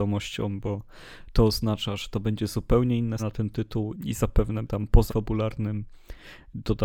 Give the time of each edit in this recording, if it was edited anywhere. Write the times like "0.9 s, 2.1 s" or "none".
3.2 s, 3.9 s, 4.7 s, 5.1 s